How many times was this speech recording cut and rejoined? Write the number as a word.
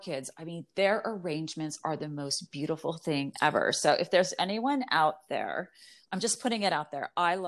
zero